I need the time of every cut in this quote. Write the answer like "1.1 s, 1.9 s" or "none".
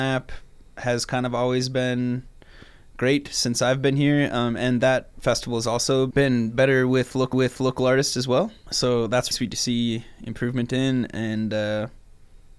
7.3 s, 9.3 s